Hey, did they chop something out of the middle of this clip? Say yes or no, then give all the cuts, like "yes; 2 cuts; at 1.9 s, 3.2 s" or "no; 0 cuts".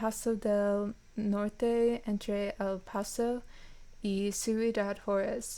no; 0 cuts